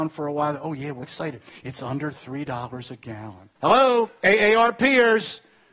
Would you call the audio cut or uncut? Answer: cut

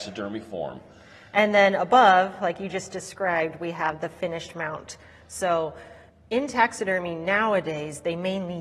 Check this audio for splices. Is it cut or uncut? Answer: cut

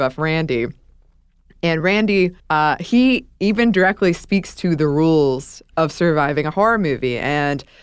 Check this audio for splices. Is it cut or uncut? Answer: cut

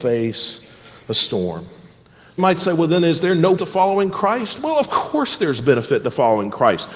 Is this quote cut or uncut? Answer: cut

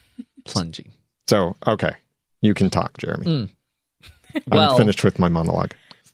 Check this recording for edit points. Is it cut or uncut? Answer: cut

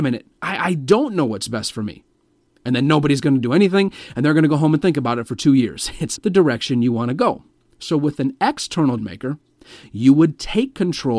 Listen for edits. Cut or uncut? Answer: cut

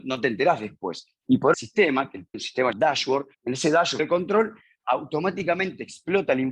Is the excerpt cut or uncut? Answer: cut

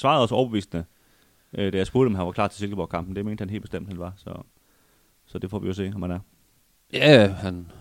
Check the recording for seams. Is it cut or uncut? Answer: uncut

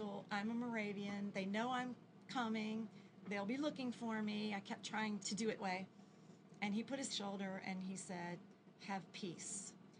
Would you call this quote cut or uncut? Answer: cut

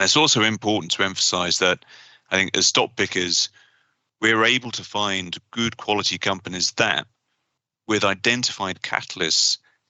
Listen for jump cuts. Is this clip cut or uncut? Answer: uncut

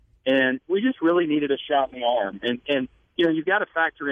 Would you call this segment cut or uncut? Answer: uncut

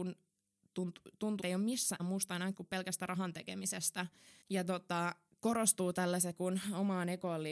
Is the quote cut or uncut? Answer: cut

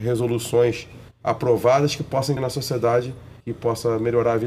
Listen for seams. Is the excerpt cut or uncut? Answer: cut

